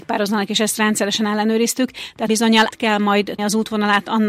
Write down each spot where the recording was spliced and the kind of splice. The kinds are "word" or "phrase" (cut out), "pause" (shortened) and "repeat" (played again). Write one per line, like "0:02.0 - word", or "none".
0:02.3 - word
0:02.7 - word
0:03.4 - word